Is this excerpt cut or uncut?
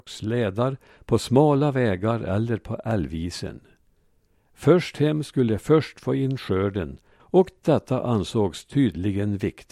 uncut